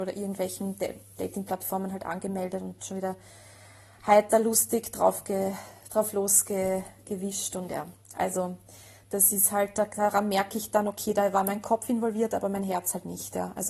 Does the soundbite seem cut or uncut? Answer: uncut